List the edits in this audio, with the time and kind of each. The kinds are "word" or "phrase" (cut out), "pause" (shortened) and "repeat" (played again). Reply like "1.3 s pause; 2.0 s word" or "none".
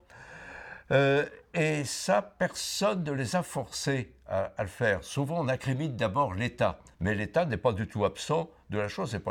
6.9 s pause